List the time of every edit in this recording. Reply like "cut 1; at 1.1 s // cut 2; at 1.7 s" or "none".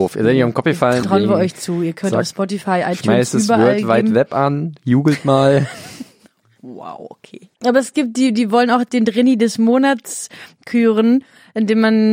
cut 1; at 1.0 s // cut 2; at 7.6 s